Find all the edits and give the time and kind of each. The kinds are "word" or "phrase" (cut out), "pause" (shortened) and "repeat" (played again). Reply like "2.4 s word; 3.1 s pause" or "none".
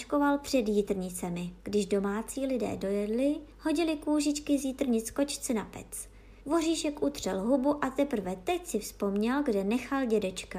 1.6 s pause; 3.5 s pause; 6.4 s pause